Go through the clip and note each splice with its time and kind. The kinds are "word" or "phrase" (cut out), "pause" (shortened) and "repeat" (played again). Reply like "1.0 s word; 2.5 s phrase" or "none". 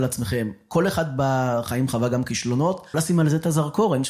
2.9 s word